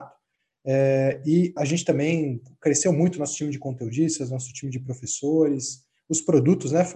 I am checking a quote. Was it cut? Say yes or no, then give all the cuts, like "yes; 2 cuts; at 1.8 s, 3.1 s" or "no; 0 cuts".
yes; 1 cut; at 1.6 s